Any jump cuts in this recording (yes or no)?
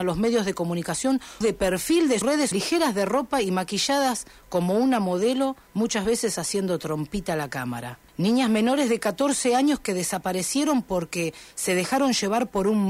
yes